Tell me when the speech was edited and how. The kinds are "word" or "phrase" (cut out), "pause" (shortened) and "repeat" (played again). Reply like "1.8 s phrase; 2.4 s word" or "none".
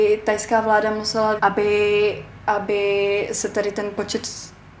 1.4 s phrase